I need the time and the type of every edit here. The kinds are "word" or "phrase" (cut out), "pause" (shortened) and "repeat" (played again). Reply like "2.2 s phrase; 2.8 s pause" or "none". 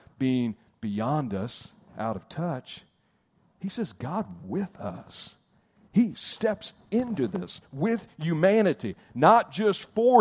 none